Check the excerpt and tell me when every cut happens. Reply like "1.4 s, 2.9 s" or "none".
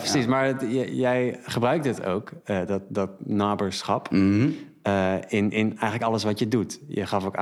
none